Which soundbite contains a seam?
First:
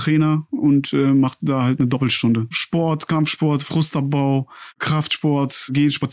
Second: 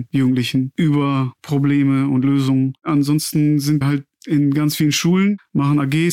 second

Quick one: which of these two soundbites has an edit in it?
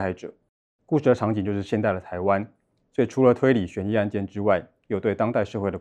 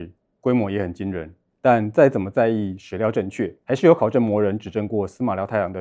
second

